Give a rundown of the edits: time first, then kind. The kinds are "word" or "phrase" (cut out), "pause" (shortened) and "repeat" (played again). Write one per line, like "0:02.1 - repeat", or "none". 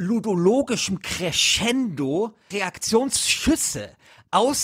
0:02.5 - word